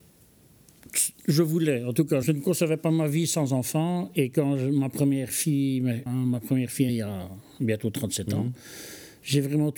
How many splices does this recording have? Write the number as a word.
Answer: three